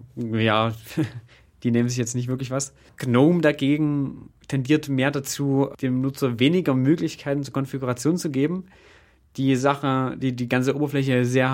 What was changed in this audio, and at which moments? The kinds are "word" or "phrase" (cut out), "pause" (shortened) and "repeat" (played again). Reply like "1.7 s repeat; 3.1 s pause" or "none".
none